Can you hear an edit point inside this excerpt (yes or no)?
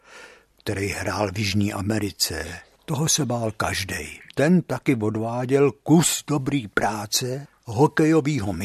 yes